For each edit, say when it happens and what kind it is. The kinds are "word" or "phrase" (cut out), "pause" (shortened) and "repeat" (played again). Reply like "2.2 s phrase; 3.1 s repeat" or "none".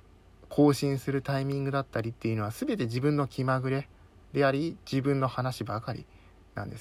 none